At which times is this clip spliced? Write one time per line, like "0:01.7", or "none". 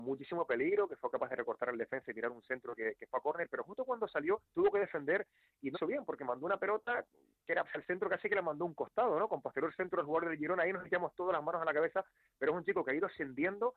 0:04.4
0:05.7
0:07.6